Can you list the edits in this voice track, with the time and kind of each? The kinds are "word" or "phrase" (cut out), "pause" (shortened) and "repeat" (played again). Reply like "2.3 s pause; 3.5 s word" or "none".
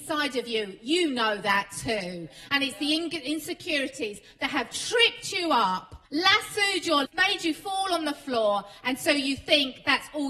6.1 s pause; 7.0 s word

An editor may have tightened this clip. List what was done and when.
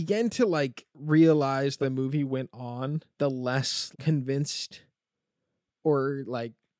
0.9 s pause; 1.8 s word; 3.1 s pause; 3.9 s word

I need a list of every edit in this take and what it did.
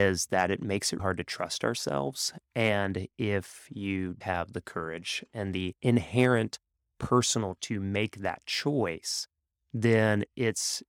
1.0 s word; 4.2 s word; 5.8 s pause; 7.6 s word

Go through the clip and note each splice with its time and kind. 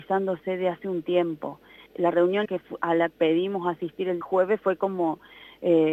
1.9 s pause; 2.4 s word; 3.1 s word; 4.2 s word

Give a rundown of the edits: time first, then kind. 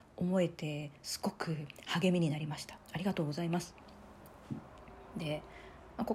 2.8 s pause

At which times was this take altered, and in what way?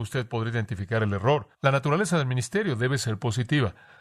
1.5 s pause

